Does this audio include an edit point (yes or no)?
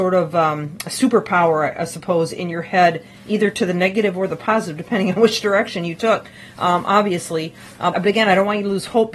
yes